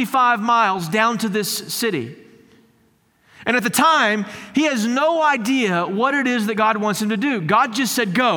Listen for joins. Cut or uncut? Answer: uncut